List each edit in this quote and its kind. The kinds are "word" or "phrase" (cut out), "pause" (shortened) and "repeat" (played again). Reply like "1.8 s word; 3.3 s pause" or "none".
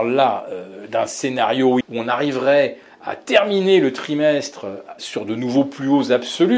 1.8 s word; 5.0 s word